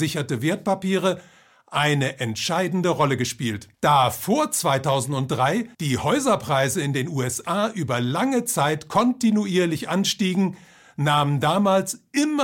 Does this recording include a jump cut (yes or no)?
yes